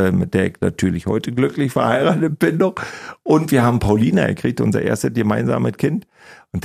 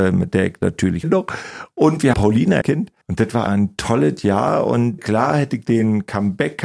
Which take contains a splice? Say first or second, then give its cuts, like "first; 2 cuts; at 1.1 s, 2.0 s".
second; 6 cuts; at 1.0 s, 2.1 s, 2.6 s, 3.0 s, 3.5 s, 5.0 s